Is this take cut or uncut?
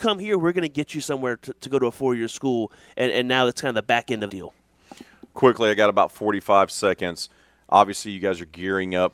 cut